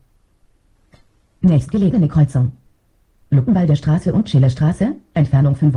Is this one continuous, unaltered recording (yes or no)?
yes